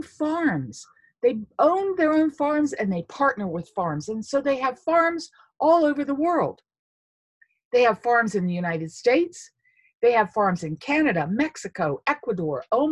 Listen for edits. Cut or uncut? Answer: uncut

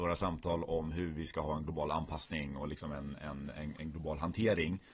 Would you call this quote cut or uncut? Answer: uncut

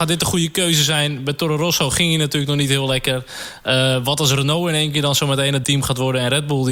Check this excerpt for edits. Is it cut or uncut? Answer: cut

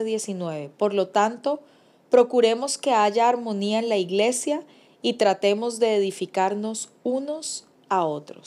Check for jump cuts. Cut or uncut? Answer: uncut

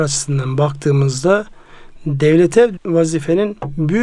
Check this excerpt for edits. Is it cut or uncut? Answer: cut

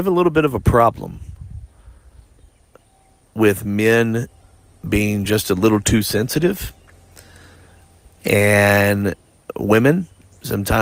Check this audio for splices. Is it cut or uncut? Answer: uncut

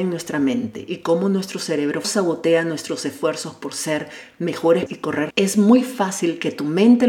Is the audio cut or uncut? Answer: cut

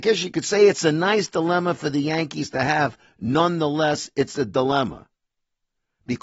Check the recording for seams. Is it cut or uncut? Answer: uncut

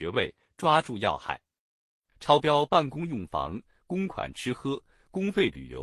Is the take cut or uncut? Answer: uncut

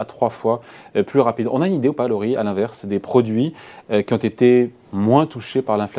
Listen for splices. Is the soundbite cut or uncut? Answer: uncut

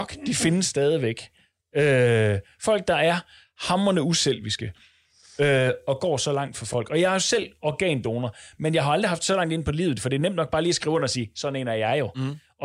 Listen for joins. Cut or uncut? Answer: uncut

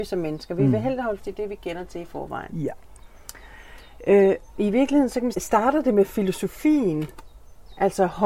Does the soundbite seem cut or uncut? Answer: cut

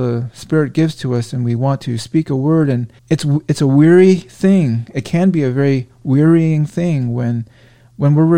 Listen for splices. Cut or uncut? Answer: cut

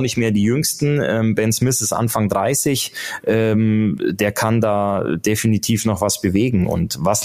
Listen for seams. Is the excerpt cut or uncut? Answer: uncut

